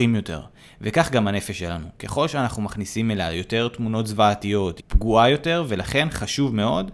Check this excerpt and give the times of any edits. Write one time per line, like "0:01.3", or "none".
0:04.8